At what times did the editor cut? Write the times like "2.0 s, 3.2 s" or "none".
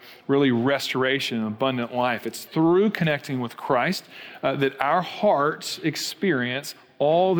none